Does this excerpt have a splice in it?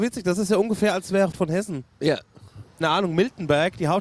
yes; 2 cuts; at 1.3 s, 2.8 s

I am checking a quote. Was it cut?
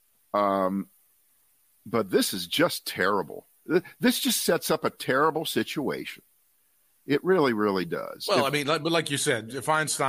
no; 0 cuts

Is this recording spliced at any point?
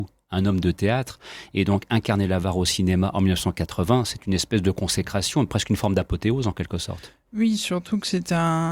no; 0 cuts

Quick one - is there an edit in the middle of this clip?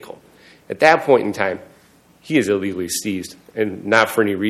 no; 0 cuts

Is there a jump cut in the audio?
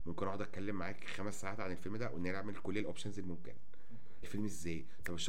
yes; 1 cut; at 4.2 s

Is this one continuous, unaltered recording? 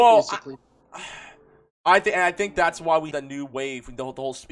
no; 1 cut; at 3.1 s

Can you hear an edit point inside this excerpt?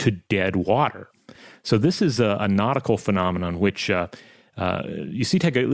no; 0 cuts

